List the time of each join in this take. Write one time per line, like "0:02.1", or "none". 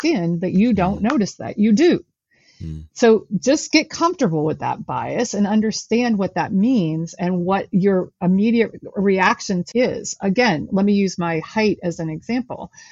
0:09.7